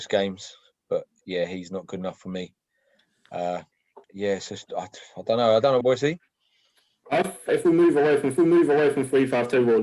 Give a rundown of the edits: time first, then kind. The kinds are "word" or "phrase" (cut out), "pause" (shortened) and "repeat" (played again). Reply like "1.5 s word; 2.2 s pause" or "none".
4.0 s pause; 5.8 s phrase; 7.5 s phrase; 8.4 s repeat